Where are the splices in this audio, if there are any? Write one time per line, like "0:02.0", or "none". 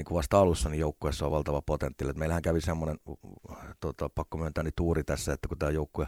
none